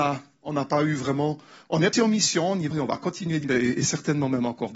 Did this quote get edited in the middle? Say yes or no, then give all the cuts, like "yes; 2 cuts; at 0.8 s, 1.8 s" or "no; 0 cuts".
yes; 3 cuts; at 1.9 s, 2.7 s, 3.4 s